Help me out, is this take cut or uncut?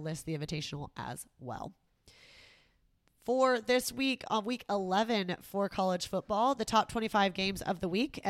uncut